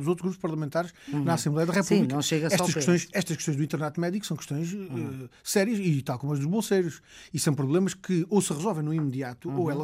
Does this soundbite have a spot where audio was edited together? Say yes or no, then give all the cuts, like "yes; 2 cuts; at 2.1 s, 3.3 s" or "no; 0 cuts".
no; 0 cuts